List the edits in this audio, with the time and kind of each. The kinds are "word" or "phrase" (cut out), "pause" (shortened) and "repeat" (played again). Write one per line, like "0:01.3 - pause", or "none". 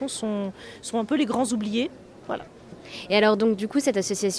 none